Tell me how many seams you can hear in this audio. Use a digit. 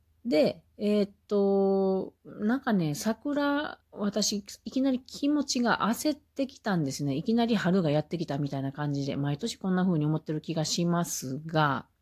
2